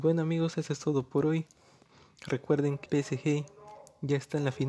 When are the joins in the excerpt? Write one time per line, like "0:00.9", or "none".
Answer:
0:02.9